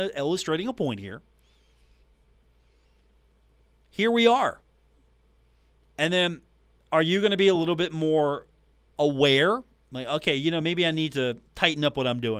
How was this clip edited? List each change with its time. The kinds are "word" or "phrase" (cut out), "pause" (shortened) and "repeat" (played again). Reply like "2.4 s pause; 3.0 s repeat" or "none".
none